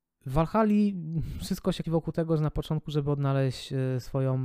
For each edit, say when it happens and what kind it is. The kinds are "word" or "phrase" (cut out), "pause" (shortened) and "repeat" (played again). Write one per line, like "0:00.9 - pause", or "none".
0:01.8 - word